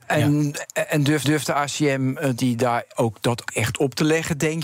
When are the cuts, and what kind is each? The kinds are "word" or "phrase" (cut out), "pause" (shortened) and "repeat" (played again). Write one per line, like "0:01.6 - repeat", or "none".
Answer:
0:01.2 - repeat
0:02.4 - word
0:03.5 - word